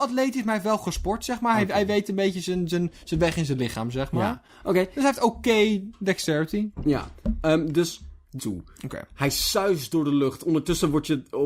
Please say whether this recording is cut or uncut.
cut